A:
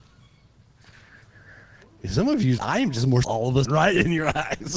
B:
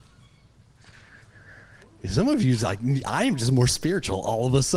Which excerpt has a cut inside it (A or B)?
A